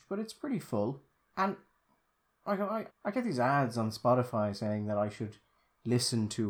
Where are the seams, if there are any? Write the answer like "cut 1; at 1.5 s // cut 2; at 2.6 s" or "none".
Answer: cut 1; at 1.2 s // cut 2; at 2.9 s

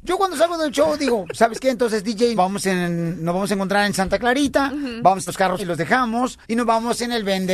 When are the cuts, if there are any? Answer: cut 1; at 2.4 s // cut 2; at 5.3 s // cut 3; at 5.6 s // cut 4; at 6.4 s

